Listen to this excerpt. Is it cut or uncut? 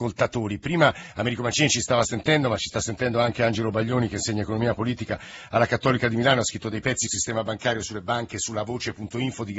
cut